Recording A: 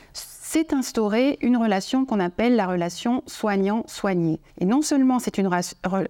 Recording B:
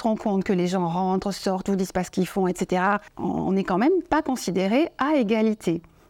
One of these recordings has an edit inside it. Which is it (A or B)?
A